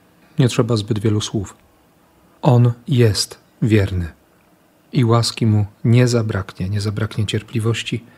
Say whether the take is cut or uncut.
uncut